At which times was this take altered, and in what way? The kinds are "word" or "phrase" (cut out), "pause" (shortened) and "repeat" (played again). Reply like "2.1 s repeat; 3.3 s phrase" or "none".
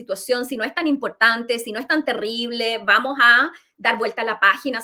none